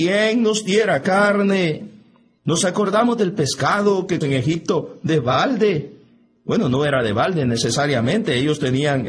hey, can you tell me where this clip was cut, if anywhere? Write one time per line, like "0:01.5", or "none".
0:01.0
0:04.2